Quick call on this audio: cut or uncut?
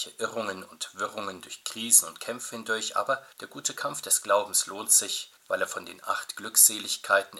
cut